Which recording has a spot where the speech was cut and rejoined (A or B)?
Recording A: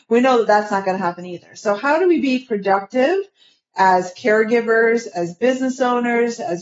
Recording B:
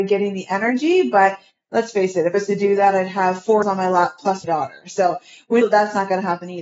B